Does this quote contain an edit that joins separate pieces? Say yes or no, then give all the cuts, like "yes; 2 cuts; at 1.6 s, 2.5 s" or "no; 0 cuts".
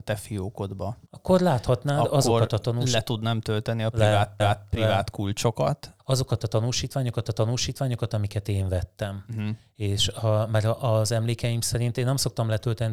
yes; 4 cuts; at 1.1 s, 4.4 s, 6.0 s, 7.2 s